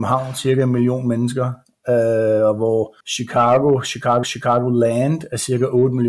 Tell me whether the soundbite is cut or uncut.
cut